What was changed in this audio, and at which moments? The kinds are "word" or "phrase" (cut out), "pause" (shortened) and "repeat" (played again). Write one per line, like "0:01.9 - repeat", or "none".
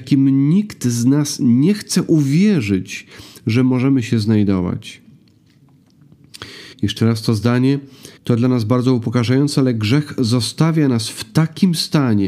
0:06.7 - pause
0:08.2 - pause